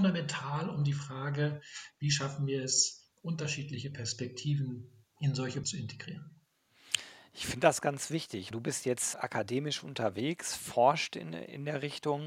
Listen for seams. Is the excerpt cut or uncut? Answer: cut